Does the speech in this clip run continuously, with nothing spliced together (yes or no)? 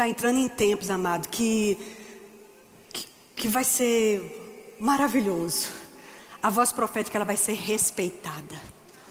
yes